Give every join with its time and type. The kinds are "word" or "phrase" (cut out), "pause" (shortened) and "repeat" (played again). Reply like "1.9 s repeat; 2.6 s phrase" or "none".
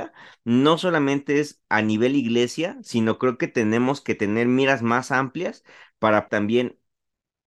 6.3 s word